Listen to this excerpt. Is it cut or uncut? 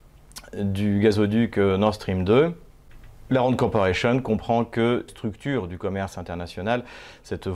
cut